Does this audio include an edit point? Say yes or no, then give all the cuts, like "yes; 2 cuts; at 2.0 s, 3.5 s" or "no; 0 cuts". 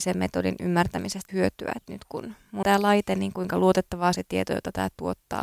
yes; 3 cuts; at 1.3 s, 2.6 s, 4.2 s